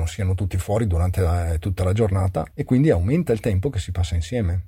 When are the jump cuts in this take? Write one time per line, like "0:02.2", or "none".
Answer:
none